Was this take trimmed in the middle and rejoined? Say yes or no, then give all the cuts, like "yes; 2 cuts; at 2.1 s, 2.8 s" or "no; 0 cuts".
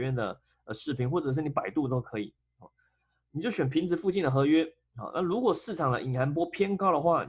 no; 0 cuts